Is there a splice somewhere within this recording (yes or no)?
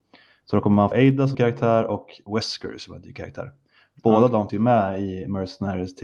yes